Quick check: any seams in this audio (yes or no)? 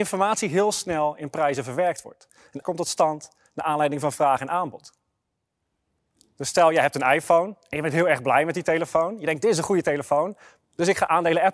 yes